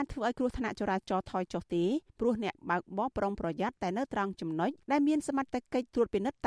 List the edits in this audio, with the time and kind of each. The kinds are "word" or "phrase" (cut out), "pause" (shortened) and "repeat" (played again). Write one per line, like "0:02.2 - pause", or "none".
0:02.1 - pause
0:04.8 - pause